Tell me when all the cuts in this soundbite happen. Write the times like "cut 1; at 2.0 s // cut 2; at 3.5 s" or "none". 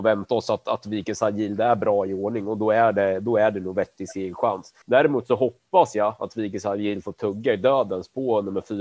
cut 1; at 4.8 s